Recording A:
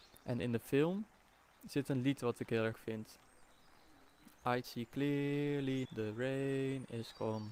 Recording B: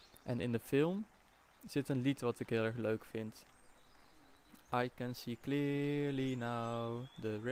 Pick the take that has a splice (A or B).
A